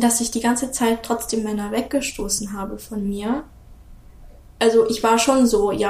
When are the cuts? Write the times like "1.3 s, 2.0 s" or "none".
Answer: none

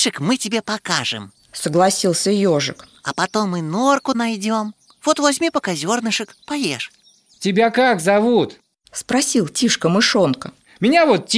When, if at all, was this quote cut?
4.1 s

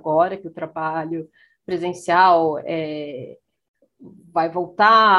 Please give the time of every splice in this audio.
none

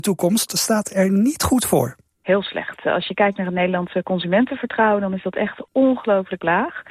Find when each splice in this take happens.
none

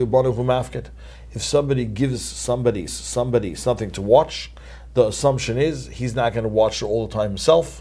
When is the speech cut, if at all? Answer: 2.9 s

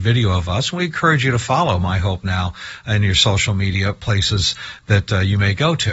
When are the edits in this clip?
none

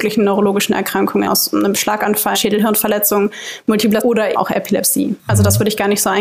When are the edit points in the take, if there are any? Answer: 1.3 s, 2.3 s, 4.0 s, 4.3 s

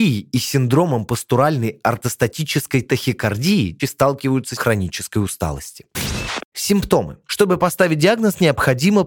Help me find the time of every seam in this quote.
3.8 s, 4.6 s

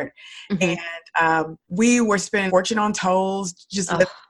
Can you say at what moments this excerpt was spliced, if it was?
1.6 s, 2.5 s

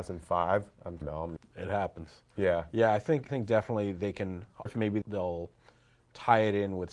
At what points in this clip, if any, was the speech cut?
1.0 s, 1.4 s, 3.3 s, 4.7 s, 5.0 s

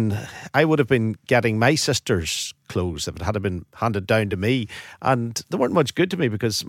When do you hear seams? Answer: none

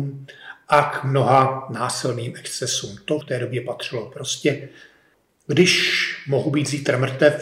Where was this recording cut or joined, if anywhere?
3.2 s

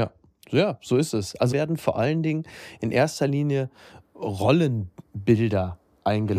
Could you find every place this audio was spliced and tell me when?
1.5 s

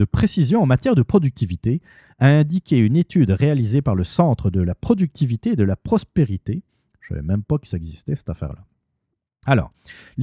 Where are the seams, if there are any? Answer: none

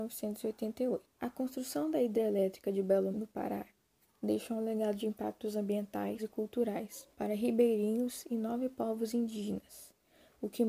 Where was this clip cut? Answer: 1.1 s, 3.1 s, 6.2 s, 7.1 s

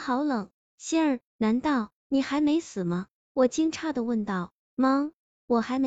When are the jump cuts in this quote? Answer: 1.3 s, 2.0 s

